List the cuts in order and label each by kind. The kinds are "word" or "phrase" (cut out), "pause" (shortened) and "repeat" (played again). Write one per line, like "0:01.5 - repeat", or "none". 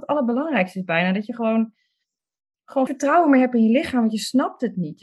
0:02.9 - word